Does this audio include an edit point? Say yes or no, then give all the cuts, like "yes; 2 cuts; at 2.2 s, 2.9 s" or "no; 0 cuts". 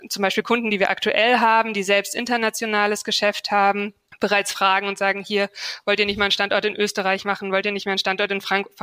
no; 0 cuts